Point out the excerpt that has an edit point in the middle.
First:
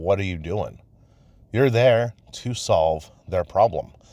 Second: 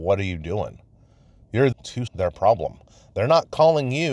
second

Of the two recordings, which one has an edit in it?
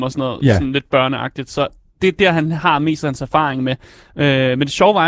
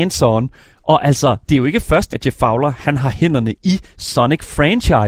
second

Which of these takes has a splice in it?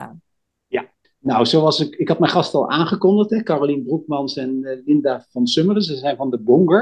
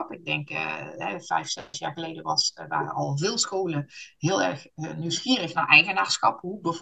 first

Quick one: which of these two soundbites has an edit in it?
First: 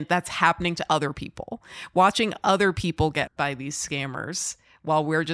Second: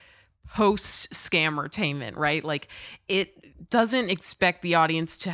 first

